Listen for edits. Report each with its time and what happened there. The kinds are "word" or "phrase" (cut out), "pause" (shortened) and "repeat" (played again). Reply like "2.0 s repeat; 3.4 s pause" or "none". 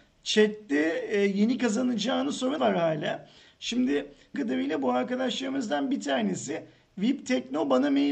1.6 s phrase; 2.6 s word; 4.3 s phrase